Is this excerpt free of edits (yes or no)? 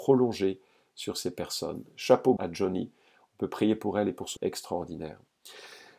no